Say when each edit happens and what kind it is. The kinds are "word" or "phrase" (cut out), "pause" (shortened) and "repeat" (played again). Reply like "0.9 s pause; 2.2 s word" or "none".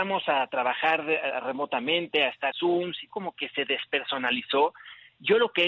2.5 s word; 3.1 s word